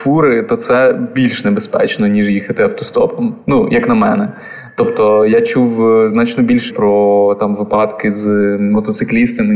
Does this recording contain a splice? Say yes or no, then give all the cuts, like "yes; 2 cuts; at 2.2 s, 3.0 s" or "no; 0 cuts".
yes; 1 cut; at 6.7 s